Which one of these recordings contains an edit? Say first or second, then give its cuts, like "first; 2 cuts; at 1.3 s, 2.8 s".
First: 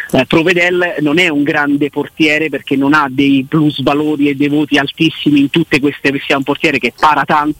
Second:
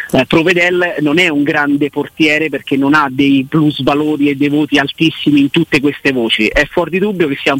first; 1 cut; at 6.1 s